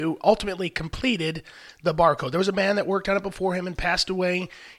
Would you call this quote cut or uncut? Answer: uncut